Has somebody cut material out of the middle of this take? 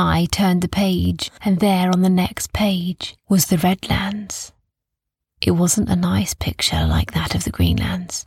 no; 0 cuts

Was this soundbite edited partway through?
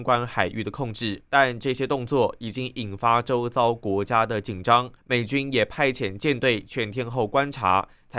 yes; 2 cuts; at 1.3 s, 5.0 s

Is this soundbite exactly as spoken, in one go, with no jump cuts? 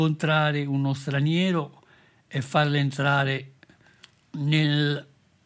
yes; 0 cuts

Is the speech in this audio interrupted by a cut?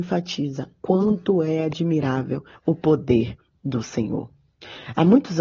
no; 0 cuts

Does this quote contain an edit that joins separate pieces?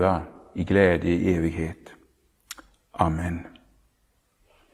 no; 0 cuts

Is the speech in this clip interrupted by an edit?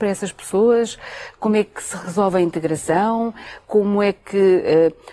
no; 0 cuts

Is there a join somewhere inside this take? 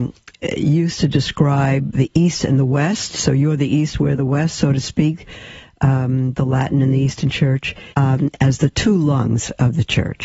yes; 1 cut; at 7.9 s

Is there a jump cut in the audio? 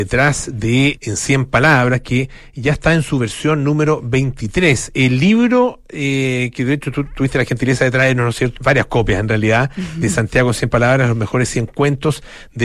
yes; 2 cuts; at 1.0 s, 8.6 s

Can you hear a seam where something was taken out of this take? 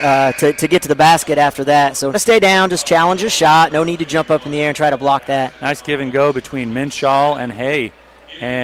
yes; 1 cut; at 2.1 s

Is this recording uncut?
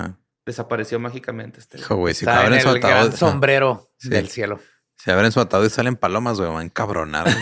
yes; 0 cuts

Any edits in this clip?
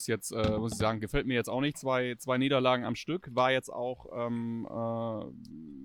no; 0 cuts

